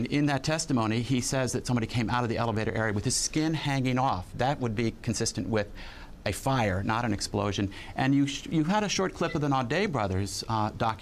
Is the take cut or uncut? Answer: uncut